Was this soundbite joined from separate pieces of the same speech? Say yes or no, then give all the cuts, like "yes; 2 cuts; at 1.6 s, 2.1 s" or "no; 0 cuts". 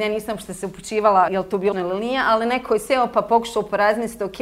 yes; 1 cut; at 1.7 s